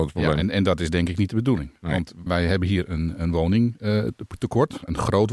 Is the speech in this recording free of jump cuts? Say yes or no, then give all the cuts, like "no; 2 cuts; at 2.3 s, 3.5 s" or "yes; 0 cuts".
no; 1 cut; at 2.3 s